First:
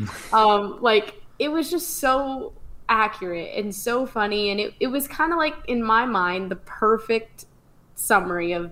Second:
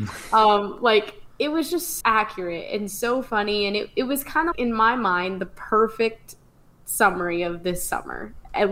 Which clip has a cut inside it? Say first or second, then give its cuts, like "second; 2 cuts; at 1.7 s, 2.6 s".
second; 2 cuts; at 2.0 s, 4.5 s